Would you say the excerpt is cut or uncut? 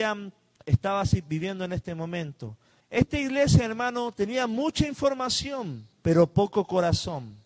cut